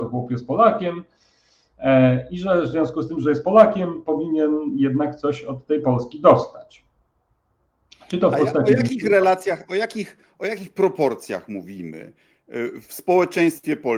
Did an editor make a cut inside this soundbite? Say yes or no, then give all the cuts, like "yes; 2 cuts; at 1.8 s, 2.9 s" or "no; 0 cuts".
no; 0 cuts